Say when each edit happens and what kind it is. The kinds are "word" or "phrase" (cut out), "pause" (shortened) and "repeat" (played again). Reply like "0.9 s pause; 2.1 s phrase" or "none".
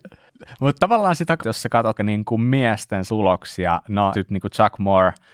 1.4 s word; 2.0 s word; 3.1 s word; 4.1 s word